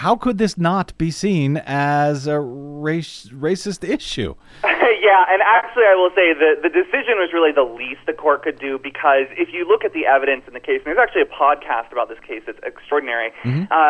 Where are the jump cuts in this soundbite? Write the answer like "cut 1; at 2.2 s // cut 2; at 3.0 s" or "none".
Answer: none